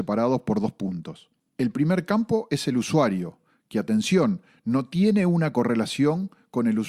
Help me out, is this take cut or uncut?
uncut